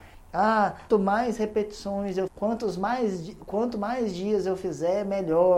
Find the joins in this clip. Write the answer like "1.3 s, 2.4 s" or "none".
0.9 s, 2.3 s